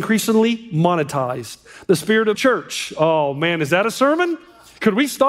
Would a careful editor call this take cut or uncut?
cut